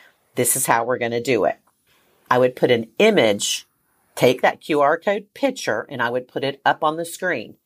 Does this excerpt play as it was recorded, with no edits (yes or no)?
yes